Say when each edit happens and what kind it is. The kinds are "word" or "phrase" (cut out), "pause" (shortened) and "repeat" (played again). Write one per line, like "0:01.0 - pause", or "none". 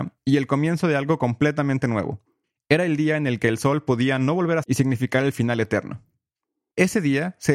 0:04.6 - word